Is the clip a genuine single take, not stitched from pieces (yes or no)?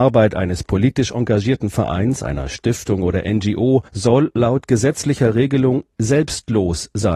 no